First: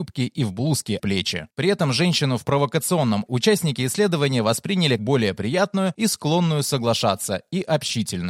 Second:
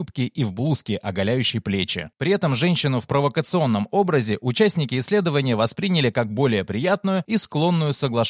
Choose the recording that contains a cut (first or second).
first